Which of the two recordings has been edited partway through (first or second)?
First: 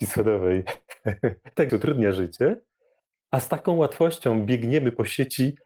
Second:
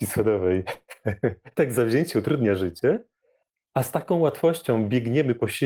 first